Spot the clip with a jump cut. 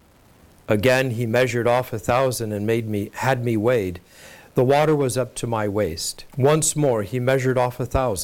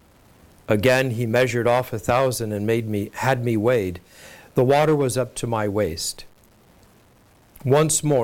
first; 1 cut; at 6.3 s

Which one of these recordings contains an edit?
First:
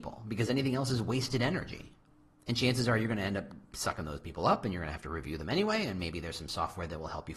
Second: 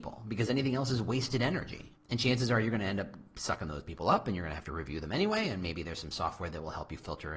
second; 1 cut; at 2.0 s

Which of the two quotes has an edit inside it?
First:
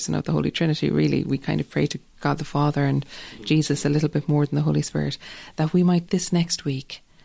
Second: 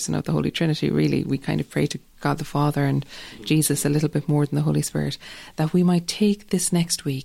first; 1 cut; at 6.1 s

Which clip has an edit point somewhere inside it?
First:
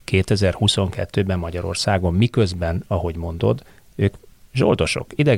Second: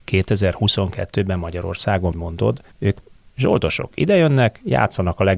second; 3 cuts; at 2.1 s, 2.7 s, 3.9 s

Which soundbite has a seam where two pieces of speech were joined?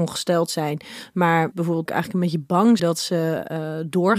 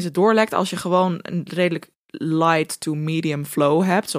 first; 3 cuts; at 1.5 s, 1.9 s, 2.8 s

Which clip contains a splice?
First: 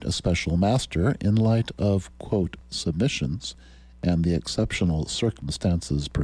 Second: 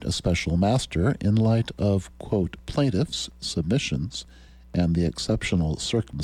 first; 1 cut; at 2.6 s

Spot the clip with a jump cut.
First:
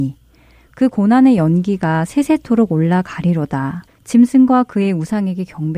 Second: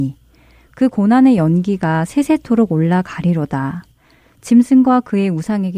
first; 1 cut; at 3.9 s

